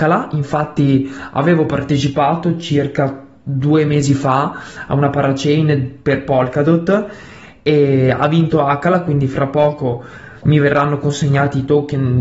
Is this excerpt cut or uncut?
uncut